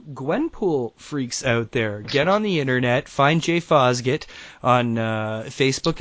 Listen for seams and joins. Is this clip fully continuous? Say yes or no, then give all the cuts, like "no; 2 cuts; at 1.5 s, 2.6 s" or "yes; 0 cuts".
yes; 0 cuts